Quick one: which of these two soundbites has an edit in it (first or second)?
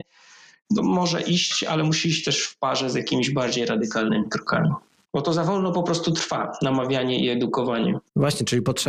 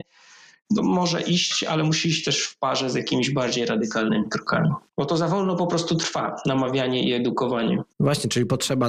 second